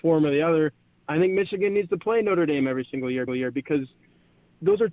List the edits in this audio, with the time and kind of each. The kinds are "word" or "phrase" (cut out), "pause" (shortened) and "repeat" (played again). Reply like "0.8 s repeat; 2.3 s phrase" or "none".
3.3 s repeat